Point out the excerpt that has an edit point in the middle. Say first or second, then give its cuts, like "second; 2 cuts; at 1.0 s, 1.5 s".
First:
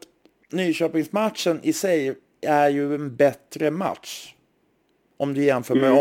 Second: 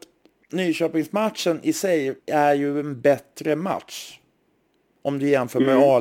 second; 1 cut; at 2.2 s